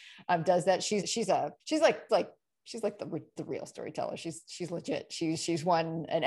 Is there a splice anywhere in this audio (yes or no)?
yes